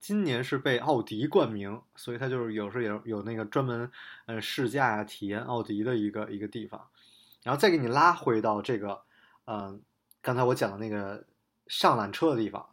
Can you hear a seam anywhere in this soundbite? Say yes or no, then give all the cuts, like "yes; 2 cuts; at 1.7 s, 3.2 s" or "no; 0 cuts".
no; 0 cuts